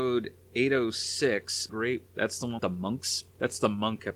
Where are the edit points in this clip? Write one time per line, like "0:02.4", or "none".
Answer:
0:01.7
0:02.0
0:02.6